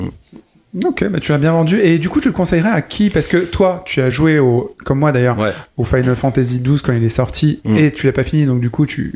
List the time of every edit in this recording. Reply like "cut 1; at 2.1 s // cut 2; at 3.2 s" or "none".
none